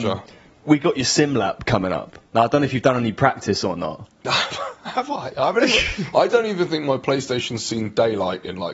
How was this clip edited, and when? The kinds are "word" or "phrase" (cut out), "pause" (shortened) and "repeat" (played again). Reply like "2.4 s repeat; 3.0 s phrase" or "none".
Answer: 2.3 s pause